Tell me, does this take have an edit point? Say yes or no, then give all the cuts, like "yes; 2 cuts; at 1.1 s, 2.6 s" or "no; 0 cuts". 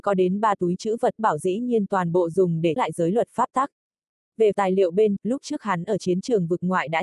yes; 4 cuts; at 1.2 s, 2.8 s, 4.5 s, 5.2 s